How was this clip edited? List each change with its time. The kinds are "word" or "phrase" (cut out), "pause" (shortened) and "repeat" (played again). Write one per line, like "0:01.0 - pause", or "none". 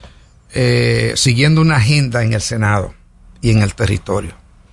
none